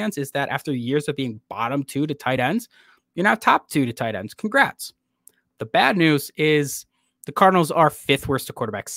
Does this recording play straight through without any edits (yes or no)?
yes